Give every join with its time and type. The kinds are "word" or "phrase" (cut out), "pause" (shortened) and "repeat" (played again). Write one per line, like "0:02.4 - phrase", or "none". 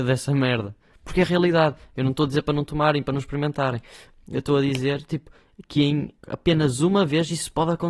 0:06.2 - pause